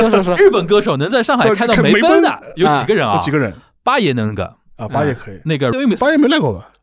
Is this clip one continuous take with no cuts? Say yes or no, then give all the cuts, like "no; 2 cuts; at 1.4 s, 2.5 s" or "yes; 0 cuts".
no; 1 cut; at 5.7 s